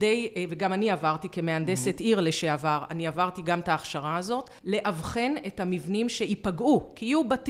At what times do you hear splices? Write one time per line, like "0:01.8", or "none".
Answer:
0:04.6